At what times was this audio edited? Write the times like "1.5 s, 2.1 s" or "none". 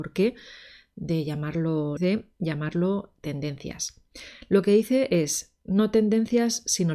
2.0 s